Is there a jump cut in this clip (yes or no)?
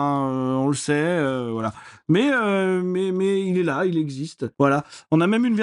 yes